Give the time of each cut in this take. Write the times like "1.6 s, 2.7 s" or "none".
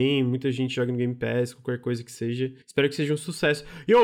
2.6 s